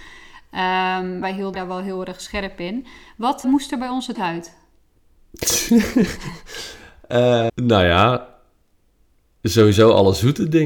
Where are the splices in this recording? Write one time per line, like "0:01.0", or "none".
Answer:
0:01.2
0:01.5
0:03.4
0:04.1
0:07.5